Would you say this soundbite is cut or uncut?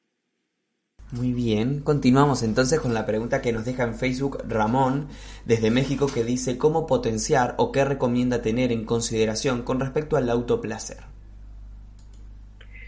uncut